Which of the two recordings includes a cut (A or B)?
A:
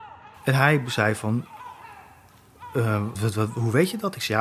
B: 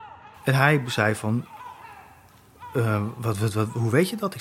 A